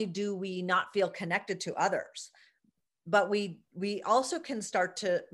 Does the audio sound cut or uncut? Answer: uncut